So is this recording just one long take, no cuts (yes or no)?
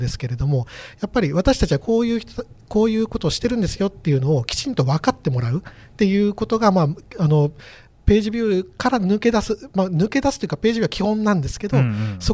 yes